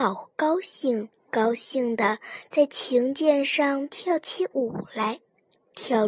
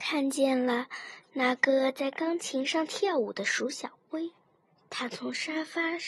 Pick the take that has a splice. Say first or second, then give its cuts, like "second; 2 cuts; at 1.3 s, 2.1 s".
first; 1 cut; at 1.2 s